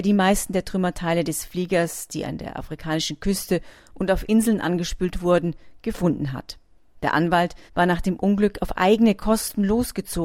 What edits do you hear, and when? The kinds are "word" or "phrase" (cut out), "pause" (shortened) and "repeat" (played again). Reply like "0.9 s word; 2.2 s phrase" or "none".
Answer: 7.7 s pause